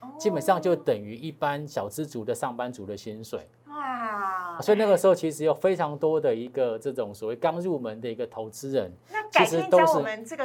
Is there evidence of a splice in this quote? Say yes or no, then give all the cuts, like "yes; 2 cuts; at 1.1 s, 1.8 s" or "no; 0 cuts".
yes; 1 cut; at 4.6 s